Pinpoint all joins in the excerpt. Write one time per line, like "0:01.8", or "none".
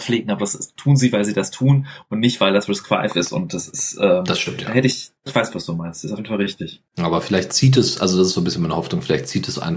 0:05.2
0:06.9